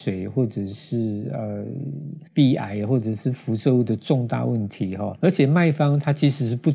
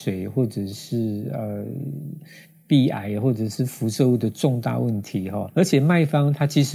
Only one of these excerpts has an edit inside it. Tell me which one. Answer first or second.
first